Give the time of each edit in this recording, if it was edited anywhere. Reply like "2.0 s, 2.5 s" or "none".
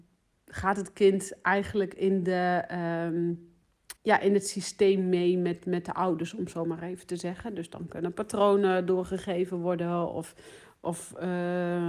4.0 s